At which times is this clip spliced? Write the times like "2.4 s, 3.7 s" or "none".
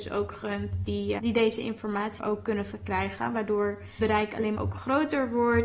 1.2 s, 2.2 s, 4.0 s, 4.5 s